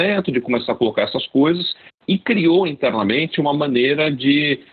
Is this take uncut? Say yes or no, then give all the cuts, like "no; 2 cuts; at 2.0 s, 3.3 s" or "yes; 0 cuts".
yes; 0 cuts